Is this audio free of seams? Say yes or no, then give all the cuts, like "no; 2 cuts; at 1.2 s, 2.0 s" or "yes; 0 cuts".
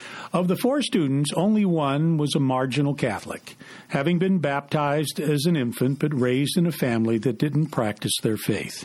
yes; 0 cuts